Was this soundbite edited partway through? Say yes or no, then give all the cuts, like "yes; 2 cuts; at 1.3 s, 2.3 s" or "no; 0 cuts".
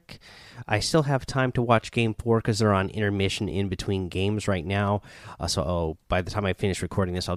no; 0 cuts